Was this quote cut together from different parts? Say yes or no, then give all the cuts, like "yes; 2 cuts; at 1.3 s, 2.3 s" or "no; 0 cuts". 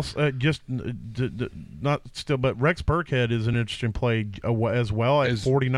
no; 0 cuts